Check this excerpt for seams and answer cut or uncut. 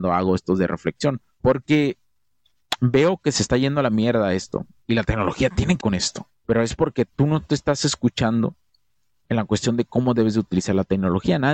cut